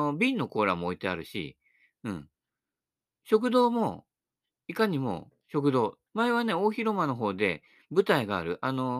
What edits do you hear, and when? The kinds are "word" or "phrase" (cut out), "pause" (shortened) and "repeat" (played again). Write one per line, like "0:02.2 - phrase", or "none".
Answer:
0:06.1 - pause